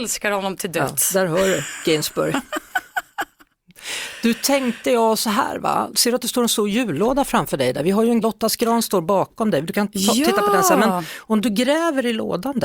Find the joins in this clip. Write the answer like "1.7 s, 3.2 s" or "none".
8.2 s